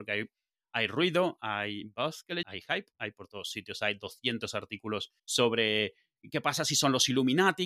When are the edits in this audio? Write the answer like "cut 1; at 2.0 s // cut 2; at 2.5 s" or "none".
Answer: cut 1; at 2.4 s // cut 2; at 5.2 s

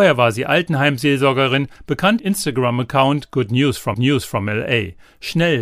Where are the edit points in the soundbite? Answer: cut 1; at 2.2 s // cut 2; at 3.9 s

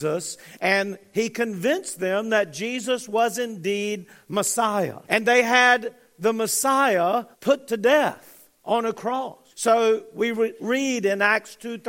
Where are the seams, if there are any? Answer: cut 1; at 5.0 s // cut 2; at 7.3 s // cut 3; at 9.5 s

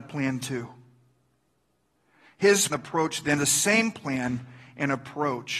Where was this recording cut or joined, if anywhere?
cut 1; at 2.7 s // cut 2; at 3.4 s

